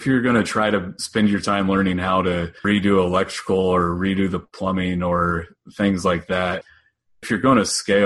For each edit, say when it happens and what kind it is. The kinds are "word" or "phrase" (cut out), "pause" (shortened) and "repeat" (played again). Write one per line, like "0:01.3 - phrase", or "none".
0:02.6 - pause